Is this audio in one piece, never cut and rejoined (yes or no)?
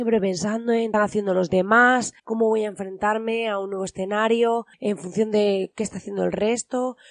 no